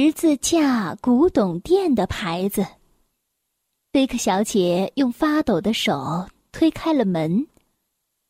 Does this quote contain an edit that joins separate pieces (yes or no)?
no